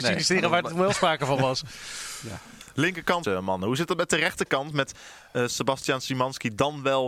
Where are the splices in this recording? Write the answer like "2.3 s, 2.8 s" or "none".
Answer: 3.2 s

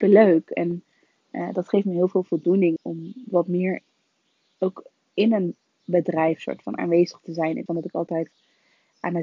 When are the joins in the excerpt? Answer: 2.8 s, 7.7 s

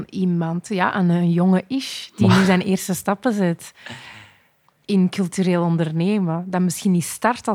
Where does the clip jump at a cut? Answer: none

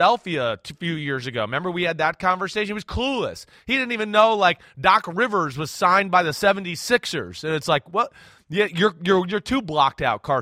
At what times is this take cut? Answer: none

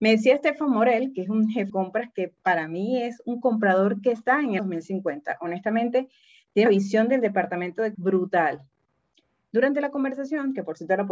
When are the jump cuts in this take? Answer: 1.7 s, 4.6 s, 6.7 s, 7.9 s

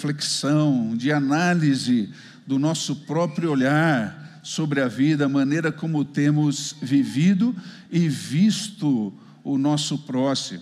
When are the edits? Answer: none

